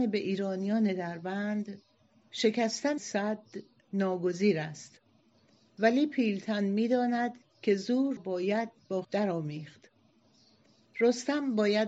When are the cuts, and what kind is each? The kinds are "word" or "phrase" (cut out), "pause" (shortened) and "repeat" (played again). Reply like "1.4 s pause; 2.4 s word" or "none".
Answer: 3.0 s word; 8.2 s word; 9.0 s word